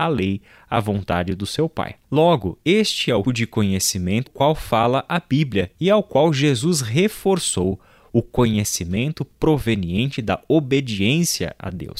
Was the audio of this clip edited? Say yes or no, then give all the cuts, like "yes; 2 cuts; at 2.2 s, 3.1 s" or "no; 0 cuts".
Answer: yes; 3 cuts; at 2.0 s, 3.2 s, 4.3 s